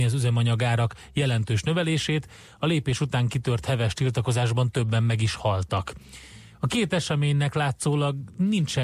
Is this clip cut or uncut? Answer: uncut